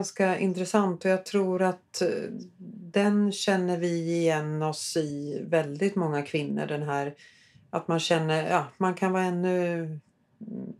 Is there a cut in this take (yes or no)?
no